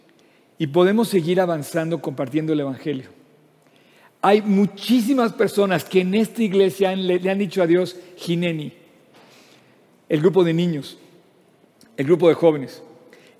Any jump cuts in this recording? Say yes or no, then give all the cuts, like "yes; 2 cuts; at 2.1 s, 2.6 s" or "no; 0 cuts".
no; 0 cuts